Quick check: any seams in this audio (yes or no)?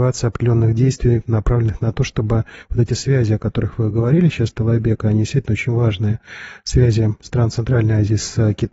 no